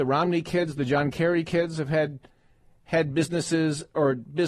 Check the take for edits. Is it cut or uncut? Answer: uncut